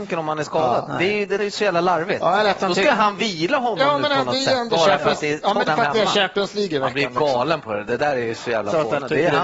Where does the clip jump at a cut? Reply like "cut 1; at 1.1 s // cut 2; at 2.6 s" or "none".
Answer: cut 1; at 1.4 s // cut 2; at 5.7 s